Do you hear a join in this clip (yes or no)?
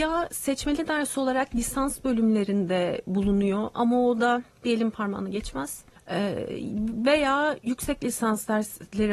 yes